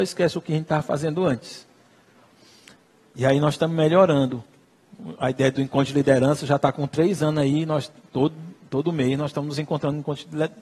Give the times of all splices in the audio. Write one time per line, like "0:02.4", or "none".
none